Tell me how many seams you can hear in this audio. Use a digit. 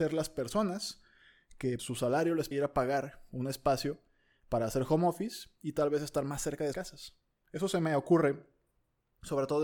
3